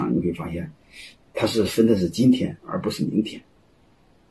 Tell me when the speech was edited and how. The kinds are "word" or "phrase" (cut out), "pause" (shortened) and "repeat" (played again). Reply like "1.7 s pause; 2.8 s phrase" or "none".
2.6 s pause

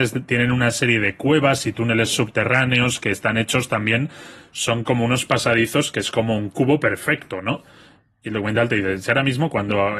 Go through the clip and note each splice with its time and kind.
none

